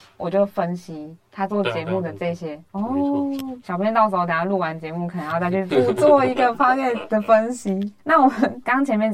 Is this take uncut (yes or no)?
yes